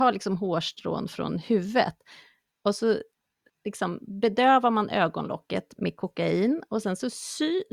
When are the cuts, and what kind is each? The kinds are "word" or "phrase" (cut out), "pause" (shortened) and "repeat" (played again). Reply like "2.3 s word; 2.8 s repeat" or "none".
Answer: none